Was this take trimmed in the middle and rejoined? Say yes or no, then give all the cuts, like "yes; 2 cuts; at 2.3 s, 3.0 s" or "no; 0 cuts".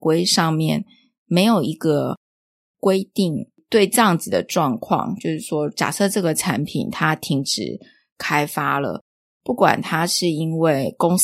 no; 0 cuts